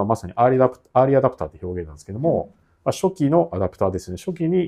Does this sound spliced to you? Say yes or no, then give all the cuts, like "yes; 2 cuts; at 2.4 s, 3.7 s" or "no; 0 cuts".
no; 0 cuts